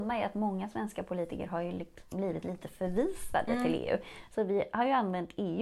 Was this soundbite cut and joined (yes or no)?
no